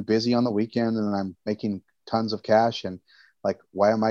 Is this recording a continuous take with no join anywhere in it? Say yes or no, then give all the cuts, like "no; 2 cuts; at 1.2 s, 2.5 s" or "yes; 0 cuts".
yes; 0 cuts